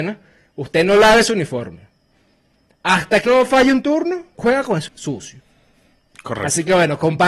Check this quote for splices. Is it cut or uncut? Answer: cut